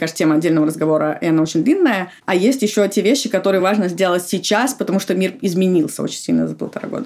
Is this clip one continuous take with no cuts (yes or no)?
yes